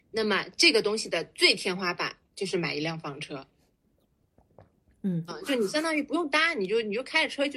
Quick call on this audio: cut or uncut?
cut